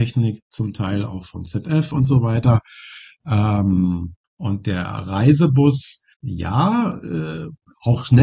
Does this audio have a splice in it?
yes; 2 cuts; at 4.2 s, 6.1 s

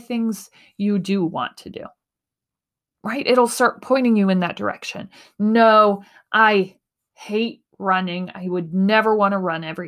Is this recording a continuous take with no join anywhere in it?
yes; 0 cuts

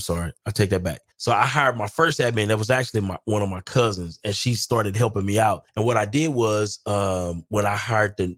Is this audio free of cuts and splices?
no; 2 cuts; at 1.1 s, 5.7 s

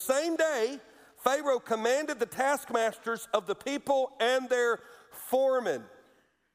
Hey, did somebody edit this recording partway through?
no; 0 cuts

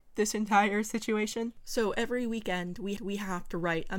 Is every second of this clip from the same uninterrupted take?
no; 1 cut; at 3.0 s

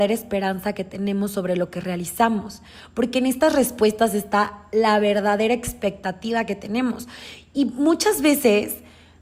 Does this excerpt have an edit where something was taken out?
no; 0 cuts

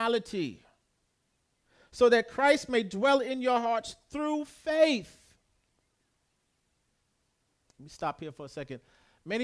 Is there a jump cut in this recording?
no; 0 cuts

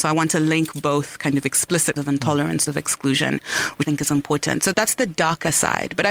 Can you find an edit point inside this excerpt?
yes; 4 cuts; at 2.0 s, 2.7 s, 3.8 s, 4.7 s

